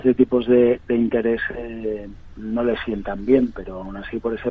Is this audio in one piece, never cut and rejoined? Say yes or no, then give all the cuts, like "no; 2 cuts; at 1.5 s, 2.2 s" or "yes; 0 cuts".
yes; 0 cuts